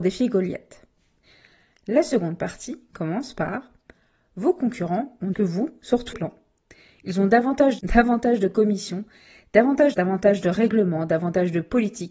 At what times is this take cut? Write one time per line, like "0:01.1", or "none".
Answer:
0:05.3
0:06.1
0:07.8
0:09.9